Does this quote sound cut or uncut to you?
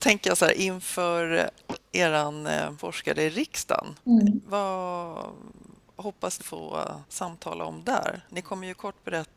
cut